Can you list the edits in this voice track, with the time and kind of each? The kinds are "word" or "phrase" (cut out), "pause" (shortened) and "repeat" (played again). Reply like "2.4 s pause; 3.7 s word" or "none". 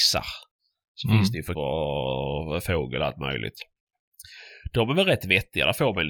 1.5 s word